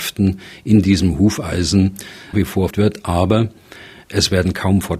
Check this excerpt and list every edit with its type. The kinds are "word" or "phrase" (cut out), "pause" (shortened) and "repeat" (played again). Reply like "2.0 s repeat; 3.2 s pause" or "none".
2.3 s word; 2.7 s word